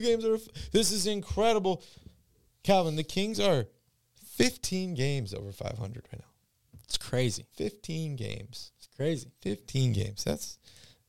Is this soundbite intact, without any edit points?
yes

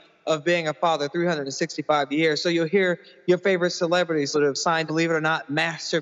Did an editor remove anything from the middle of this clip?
yes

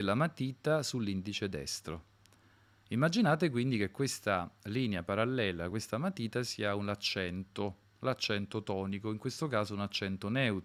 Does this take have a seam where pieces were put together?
no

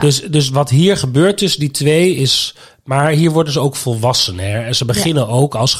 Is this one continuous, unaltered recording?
yes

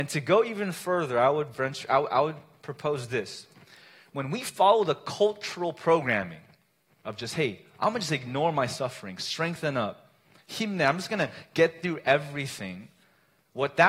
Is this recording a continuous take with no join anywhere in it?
yes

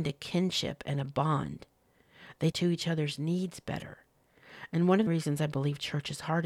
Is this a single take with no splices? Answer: no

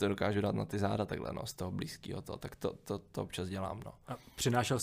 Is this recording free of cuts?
yes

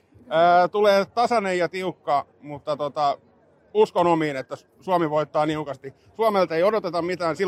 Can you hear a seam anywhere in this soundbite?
no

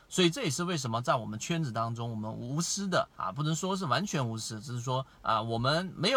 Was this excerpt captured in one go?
no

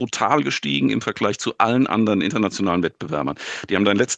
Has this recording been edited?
no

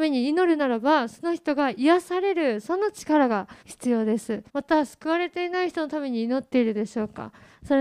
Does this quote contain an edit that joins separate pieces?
yes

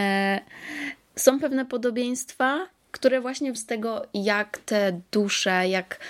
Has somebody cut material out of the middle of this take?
yes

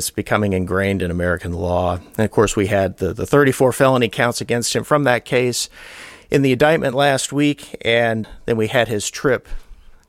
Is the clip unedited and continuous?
yes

